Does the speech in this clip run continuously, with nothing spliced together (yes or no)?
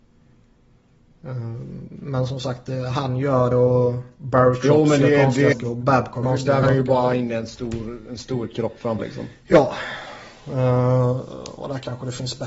no